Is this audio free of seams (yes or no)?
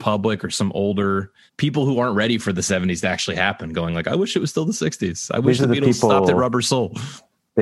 yes